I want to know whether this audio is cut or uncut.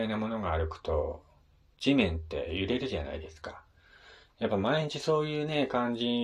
uncut